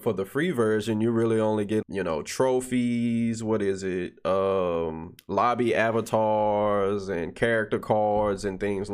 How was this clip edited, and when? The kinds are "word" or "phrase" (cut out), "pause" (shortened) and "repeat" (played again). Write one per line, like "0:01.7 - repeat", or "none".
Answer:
0:01.8 - word